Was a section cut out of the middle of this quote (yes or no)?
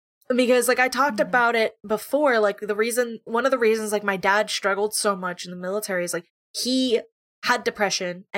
no